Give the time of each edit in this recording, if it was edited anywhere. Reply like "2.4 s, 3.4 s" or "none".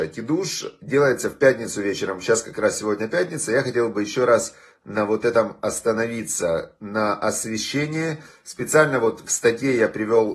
none